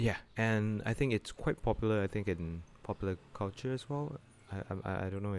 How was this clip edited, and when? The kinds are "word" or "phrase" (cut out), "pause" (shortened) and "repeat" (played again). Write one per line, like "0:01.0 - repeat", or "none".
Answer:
none

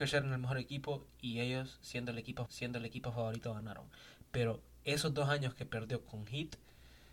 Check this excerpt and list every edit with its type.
0:02.5 - repeat

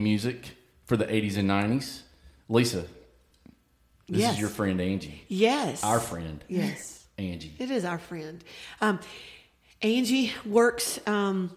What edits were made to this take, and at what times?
none

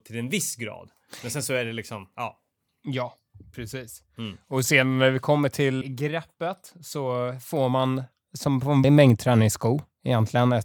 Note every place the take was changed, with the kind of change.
0:05.8 - word
0:08.8 - word

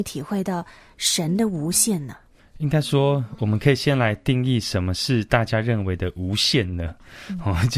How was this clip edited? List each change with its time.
none

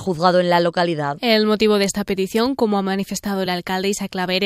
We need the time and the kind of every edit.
none

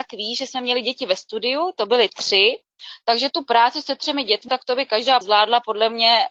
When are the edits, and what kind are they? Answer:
0:04.5 - word
0:05.2 - word

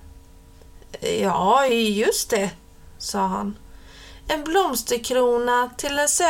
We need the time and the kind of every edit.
none

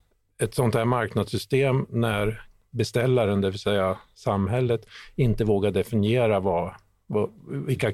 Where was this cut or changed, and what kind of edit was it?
none

